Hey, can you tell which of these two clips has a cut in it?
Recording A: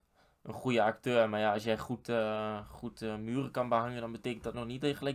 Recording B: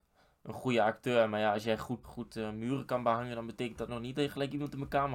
B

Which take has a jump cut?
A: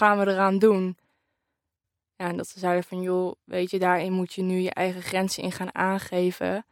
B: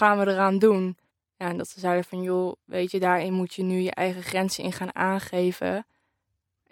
B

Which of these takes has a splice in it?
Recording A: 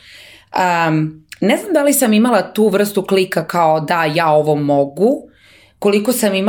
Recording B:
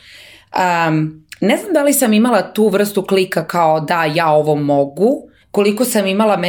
B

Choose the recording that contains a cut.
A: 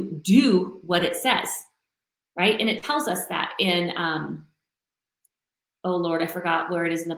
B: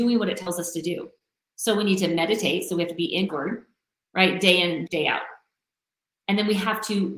B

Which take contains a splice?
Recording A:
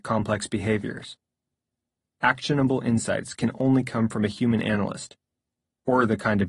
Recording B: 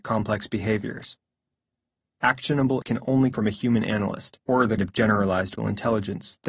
B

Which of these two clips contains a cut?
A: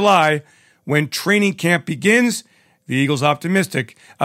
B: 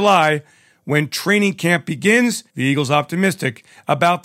B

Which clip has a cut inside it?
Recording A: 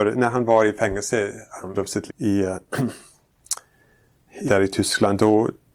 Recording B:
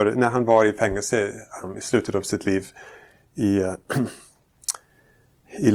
A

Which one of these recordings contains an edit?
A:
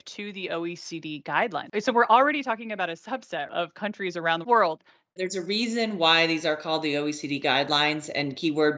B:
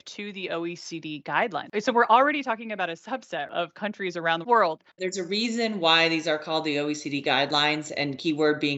B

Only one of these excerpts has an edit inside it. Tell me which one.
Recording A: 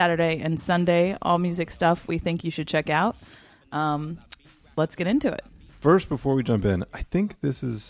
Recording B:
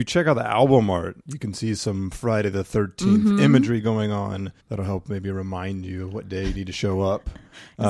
B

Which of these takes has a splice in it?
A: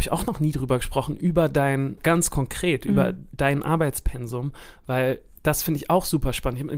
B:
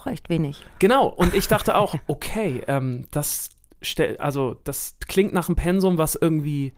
A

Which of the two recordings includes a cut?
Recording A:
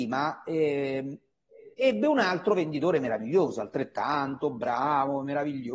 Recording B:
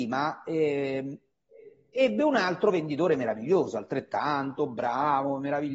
A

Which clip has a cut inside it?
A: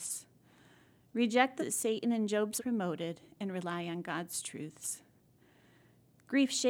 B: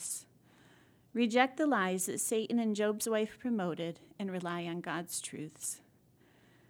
A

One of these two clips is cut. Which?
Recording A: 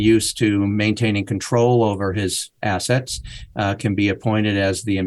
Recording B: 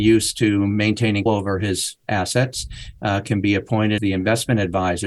B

